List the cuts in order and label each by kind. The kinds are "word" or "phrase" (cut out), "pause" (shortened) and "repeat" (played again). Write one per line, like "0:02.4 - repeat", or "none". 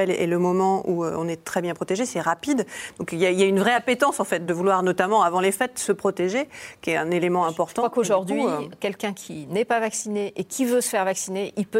none